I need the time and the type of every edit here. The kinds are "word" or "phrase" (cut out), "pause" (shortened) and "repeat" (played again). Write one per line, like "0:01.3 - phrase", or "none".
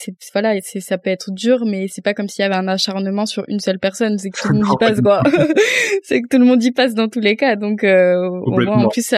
none